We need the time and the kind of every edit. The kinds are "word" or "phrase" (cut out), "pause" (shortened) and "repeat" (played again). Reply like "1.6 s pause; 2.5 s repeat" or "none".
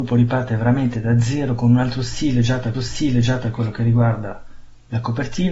2.7 s repeat